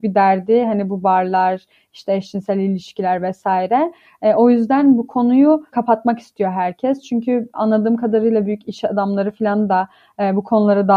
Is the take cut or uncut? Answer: cut